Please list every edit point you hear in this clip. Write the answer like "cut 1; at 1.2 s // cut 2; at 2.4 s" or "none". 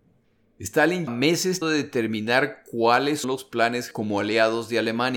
cut 1; at 1.1 s // cut 2; at 1.6 s // cut 3; at 3.2 s // cut 4; at 3.9 s

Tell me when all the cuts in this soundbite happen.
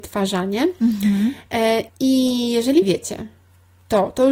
cut 1; at 1.9 s // cut 2; at 2.8 s

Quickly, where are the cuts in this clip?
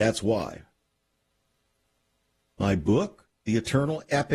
cut 1; at 3.3 s

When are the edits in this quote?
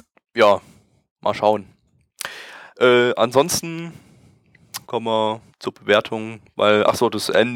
cut 1; at 4.8 s // cut 2; at 5.5 s

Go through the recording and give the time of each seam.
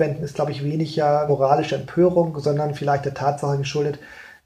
cut 1; at 1.3 s

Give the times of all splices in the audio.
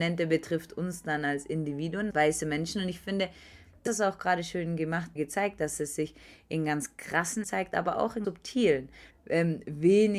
cut 1; at 2.1 s // cut 2; at 3.9 s // cut 3; at 5.2 s // cut 4; at 7.4 s // cut 5; at 8.2 s // cut 6; at 9.1 s

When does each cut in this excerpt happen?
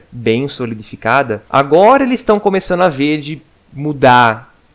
cut 1; at 1.5 s

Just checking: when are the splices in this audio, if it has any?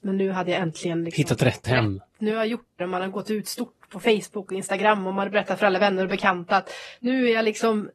cut 1; at 1.6 s // cut 2; at 2.8 s

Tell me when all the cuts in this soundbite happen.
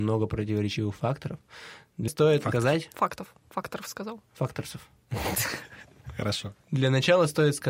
cut 1; at 2.1 s // cut 2; at 4.3 s // cut 3; at 6.6 s

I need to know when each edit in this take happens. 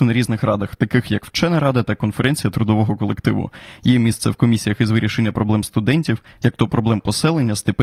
none

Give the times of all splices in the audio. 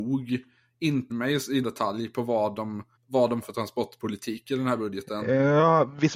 cut 1; at 1.1 s // cut 2; at 1.6 s // cut 3; at 3.0 s // cut 4; at 3.4 s

